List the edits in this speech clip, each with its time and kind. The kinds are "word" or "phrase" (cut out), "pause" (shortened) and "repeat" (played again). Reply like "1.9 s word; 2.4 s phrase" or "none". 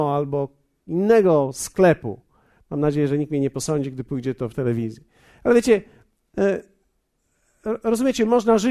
none